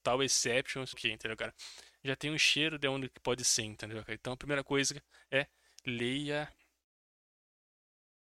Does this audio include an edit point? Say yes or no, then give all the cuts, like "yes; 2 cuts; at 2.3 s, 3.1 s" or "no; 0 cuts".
yes; 1 cut; at 0.9 s